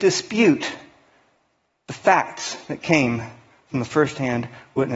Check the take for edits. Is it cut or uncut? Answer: uncut